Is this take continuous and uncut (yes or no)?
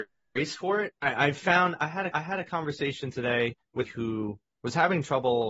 no